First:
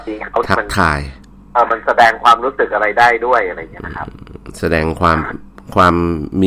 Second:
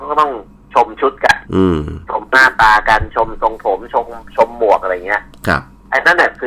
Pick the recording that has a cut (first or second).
second